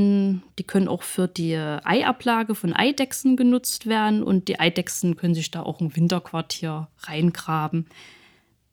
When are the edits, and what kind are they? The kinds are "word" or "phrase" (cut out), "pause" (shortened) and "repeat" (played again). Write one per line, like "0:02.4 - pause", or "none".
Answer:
none